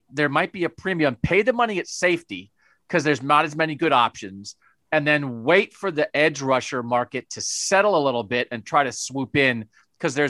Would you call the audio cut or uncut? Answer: uncut